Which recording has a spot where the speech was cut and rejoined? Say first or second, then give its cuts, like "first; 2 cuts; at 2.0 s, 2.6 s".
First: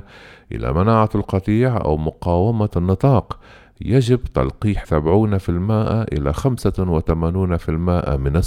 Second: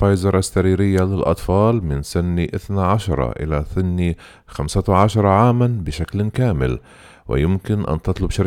first; 2 cuts; at 2.7 s, 4.8 s